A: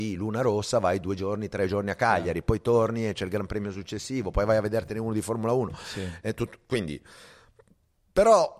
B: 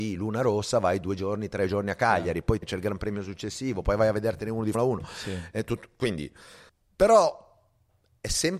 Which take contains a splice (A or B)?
B